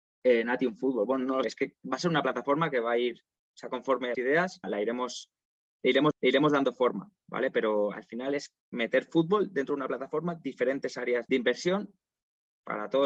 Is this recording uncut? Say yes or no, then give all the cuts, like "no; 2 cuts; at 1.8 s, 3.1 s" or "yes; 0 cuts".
no; 6 cuts; at 1.4 s, 4.1 s, 4.6 s, 6.1 s, 8.6 s, 11.3 s